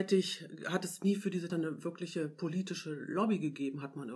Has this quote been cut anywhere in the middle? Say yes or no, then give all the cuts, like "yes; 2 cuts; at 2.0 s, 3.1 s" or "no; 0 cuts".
yes; 1 cut; at 1.5 s